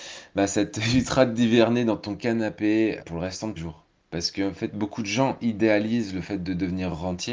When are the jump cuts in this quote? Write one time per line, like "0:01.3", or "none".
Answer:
0:03.0
0:03.6